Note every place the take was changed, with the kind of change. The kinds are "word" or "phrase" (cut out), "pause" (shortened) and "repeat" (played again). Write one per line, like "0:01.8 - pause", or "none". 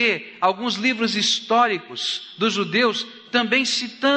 none